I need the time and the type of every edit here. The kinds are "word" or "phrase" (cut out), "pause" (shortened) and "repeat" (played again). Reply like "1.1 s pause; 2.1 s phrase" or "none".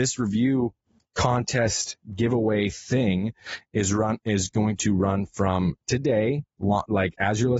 none